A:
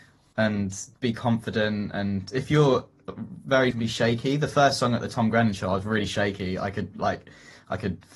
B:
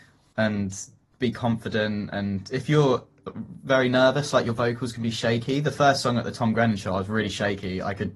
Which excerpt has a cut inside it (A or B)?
A